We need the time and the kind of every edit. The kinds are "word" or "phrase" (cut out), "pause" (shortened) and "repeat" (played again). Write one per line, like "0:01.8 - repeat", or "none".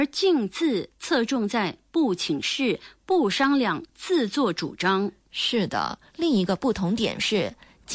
0:06.1 - pause